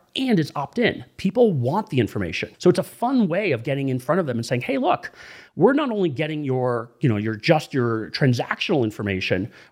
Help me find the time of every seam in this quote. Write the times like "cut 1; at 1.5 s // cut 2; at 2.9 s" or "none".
cut 1; at 2.5 s